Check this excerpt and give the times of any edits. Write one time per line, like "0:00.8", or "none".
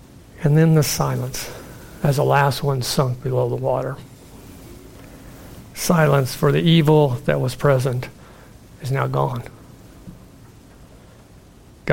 none